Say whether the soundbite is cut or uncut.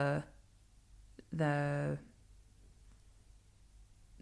uncut